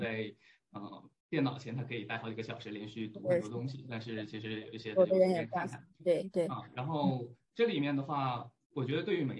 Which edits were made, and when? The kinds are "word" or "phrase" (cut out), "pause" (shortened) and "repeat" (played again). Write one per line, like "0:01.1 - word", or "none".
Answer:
0:01.2 - pause